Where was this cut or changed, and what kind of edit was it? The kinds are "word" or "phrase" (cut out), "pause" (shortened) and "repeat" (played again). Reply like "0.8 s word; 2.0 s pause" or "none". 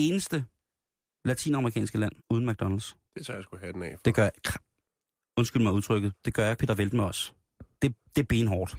2.2 s pause; 3.1 s pause; 6.6 s word